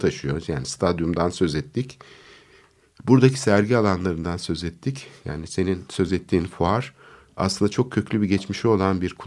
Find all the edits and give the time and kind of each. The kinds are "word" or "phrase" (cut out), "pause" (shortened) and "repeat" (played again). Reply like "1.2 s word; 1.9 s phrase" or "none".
none